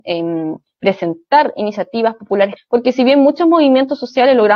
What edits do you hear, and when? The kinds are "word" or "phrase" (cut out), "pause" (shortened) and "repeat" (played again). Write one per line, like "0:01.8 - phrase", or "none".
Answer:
0:02.6 - word